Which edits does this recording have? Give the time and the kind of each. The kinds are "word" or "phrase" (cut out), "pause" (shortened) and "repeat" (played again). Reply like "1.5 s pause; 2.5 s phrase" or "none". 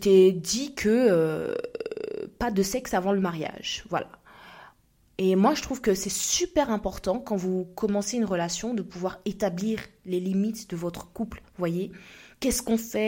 none